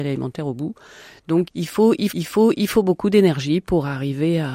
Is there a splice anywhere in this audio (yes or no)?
yes